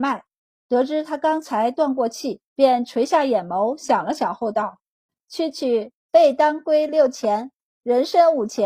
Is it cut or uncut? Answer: cut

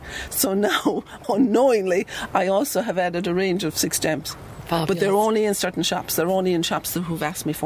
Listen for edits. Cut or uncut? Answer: cut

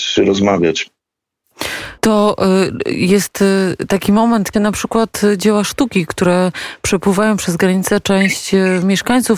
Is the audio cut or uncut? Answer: cut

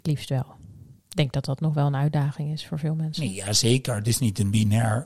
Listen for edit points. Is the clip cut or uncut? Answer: cut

